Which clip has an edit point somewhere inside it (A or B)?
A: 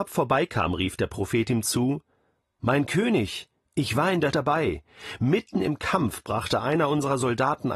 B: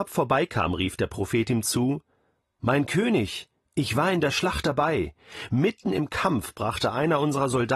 A